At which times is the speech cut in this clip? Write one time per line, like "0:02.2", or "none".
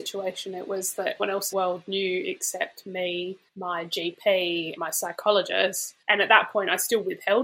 0:01.2
0:01.5
0:03.5
0:04.8
0:06.0